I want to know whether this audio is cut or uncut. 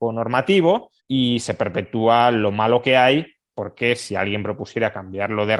cut